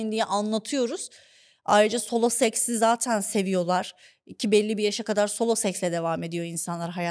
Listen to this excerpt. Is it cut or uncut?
uncut